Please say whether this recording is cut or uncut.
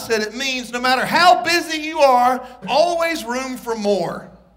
cut